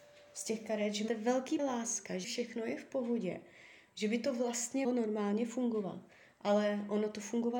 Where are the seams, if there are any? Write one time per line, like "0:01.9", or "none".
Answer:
0:01.1
0:01.6
0:02.2
0:04.8